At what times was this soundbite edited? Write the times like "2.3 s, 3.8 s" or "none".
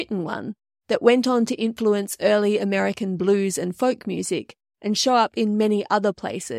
none